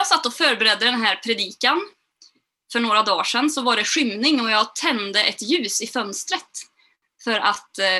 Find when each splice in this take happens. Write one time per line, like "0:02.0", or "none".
none